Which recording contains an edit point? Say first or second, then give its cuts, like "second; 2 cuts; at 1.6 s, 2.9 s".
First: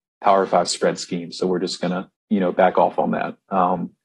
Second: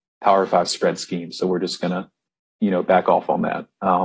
first; 1 cut; at 2.1 s